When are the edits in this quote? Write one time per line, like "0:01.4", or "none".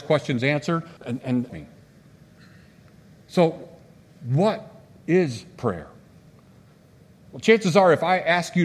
0:01.0
0:01.5